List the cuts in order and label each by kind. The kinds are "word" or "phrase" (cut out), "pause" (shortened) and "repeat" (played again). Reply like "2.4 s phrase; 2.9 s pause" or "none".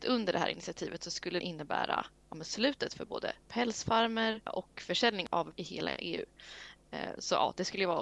1.4 s phrase; 3.4 s pause; 5.5 s word